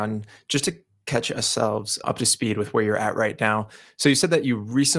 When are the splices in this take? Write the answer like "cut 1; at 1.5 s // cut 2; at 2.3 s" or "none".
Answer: cut 1; at 2.0 s